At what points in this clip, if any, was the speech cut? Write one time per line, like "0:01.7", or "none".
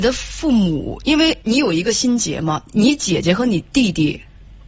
0:01.4